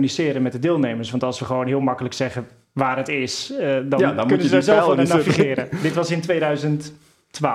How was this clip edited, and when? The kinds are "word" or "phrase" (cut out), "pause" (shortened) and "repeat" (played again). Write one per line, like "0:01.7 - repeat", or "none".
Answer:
none